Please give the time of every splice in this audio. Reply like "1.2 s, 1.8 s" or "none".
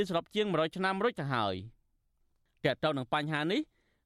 none